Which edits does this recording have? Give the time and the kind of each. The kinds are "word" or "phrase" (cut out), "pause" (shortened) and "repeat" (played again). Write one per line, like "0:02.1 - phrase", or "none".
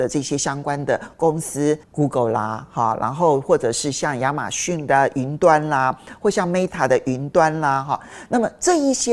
0:01.8 - pause